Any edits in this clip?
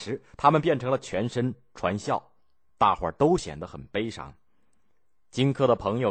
no; 0 cuts

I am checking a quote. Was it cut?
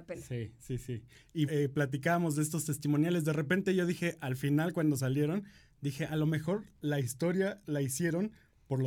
yes; 1 cut; at 1.5 s

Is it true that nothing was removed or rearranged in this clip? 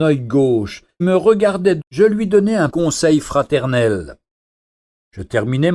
no; 3 cuts; at 1.0 s, 1.8 s, 2.7 s

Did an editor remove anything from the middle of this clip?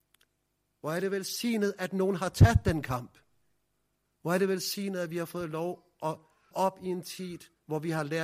yes; 1 cut; at 6.5 s

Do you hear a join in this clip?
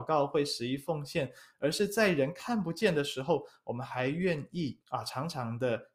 yes; 1 cut; at 4.8 s

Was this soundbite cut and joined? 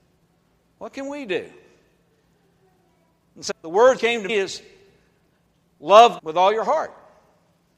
yes; 4 cuts; at 3.5 s, 4.0 s, 4.3 s, 6.2 s

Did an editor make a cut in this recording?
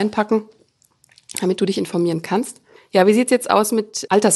yes; 1 cut; at 2.8 s

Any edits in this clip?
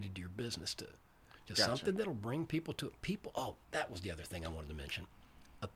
yes; 1 cut; at 3.6 s

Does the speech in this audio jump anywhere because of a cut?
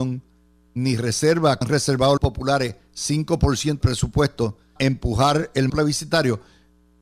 yes; 5 cuts; at 1.6 s, 2.2 s, 3.8 s, 4.8 s, 5.7 s

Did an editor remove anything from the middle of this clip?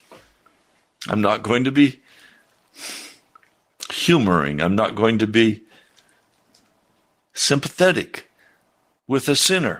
no; 0 cuts

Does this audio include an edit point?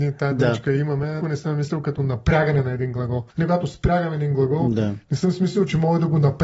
yes; 2 cuts; at 1.2 s, 3.3 s

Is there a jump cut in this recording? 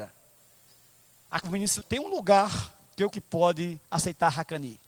yes; 4 cuts; at 1.4 s, 1.8 s, 3.1 s, 3.8 s

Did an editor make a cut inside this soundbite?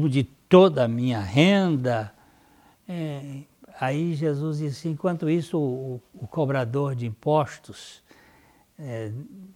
no; 0 cuts

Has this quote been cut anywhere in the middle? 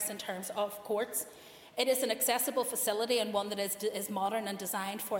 no; 0 cuts

